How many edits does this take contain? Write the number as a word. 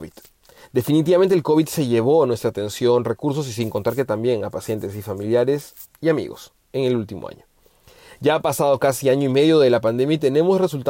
zero